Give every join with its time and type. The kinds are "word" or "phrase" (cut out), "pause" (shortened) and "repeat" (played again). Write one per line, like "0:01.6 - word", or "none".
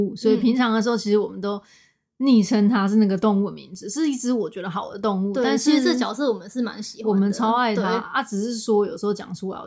none